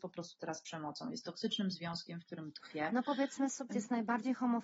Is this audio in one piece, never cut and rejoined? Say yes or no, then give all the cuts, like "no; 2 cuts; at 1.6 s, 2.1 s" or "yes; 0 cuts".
no; 1 cut; at 3.7 s